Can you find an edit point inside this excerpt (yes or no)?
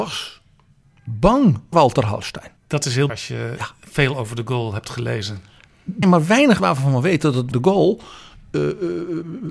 yes